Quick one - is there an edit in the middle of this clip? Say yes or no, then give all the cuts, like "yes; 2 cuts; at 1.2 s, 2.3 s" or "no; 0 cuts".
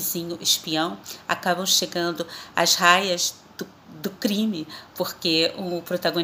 yes; 1 cut; at 4.9 s